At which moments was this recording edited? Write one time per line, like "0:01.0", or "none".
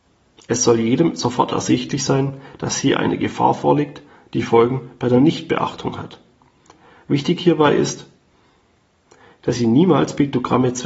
none